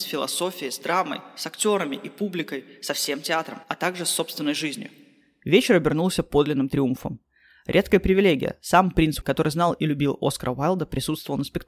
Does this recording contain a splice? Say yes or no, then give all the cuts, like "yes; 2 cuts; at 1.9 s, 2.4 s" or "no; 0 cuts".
yes; 2 cuts; at 3.6 s, 9.2 s